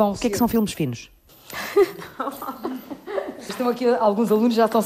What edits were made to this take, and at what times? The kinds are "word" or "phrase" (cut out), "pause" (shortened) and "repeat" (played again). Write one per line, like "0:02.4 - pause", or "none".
0:03.5 - word